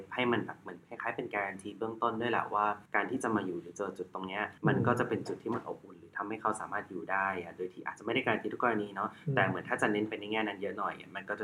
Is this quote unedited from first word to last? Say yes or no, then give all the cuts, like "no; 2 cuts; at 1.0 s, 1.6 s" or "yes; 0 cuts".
no; 2 cuts; at 2.9 s, 4.6 s